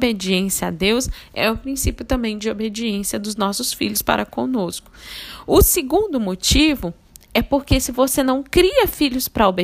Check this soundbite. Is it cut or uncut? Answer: uncut